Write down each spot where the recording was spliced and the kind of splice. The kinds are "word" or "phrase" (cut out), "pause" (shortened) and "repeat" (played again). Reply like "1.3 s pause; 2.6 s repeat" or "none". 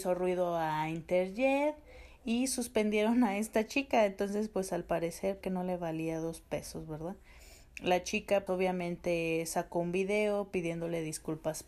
5.4 s phrase; 8.5 s word